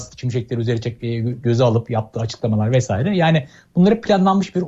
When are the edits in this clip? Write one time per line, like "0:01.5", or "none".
none